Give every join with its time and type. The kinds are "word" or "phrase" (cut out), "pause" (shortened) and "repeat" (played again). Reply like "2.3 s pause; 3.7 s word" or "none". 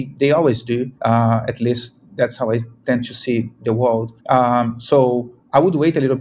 1.0 s pause; 4.2 s pause